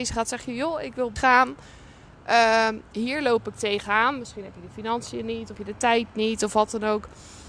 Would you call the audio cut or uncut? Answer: cut